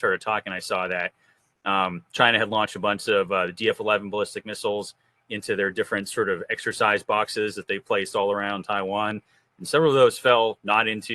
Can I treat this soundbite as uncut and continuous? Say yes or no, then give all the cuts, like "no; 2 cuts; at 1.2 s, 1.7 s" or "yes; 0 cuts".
yes; 0 cuts